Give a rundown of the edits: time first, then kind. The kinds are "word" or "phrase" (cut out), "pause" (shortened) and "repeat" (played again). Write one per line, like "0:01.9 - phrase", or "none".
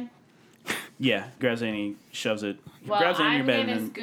0:01.4 - phrase
0:02.9 - word